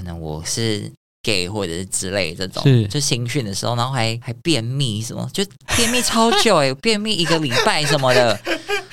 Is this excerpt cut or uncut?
uncut